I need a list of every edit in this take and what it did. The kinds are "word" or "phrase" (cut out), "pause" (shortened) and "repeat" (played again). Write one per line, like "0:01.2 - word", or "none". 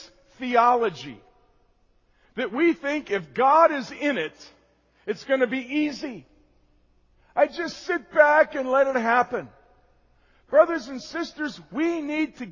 none

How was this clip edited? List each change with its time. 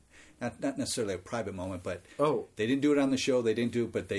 none

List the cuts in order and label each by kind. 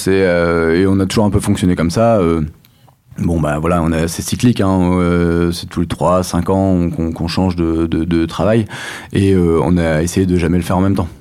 none

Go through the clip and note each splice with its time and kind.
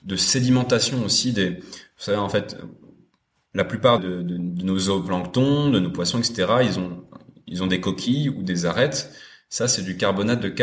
0:04.0 - word

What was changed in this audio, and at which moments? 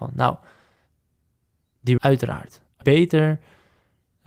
0:02.0 - word
0:02.8 - word

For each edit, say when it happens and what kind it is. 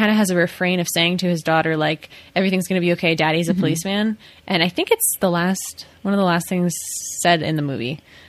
none

